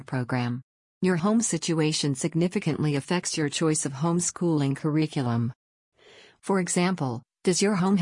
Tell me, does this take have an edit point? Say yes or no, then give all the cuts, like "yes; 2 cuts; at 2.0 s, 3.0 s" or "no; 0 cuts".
no; 0 cuts